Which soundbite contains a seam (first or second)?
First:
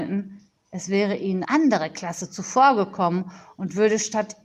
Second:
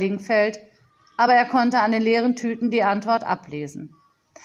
first